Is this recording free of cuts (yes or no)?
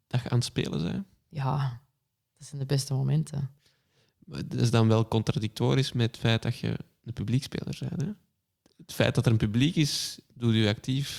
yes